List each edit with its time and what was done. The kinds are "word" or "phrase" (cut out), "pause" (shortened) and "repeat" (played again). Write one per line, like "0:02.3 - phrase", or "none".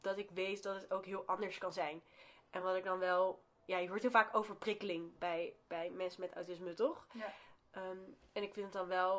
none